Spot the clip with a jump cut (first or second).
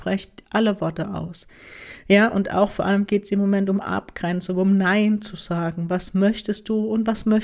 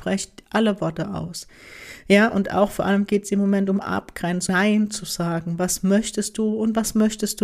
second